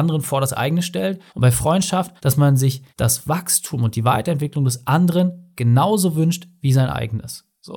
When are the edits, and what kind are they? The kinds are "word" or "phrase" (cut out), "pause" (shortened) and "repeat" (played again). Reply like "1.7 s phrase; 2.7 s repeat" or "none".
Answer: 1.3 s pause; 2.2 s pause; 2.9 s pause